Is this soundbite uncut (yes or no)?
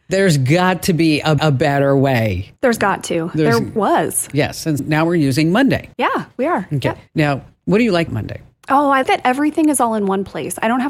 no